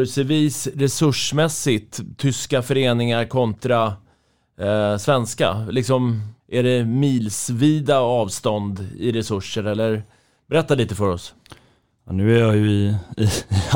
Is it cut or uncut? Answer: cut